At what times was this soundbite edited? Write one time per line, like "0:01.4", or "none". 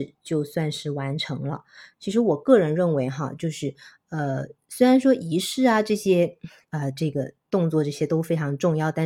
none